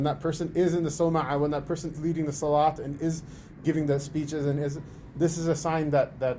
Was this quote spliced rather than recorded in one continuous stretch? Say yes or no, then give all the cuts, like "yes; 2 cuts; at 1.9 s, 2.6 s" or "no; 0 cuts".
yes; 2 cuts; at 1.9 s, 3.6 s